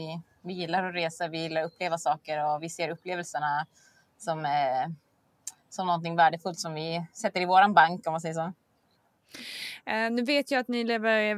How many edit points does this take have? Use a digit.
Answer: 0